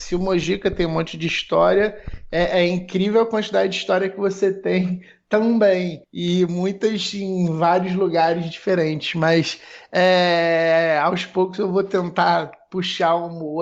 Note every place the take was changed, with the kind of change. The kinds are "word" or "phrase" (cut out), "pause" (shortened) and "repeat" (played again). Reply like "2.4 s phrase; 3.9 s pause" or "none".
6.0 s pause